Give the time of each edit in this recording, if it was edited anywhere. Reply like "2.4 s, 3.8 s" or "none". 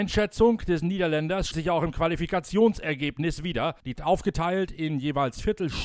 1.5 s, 4.0 s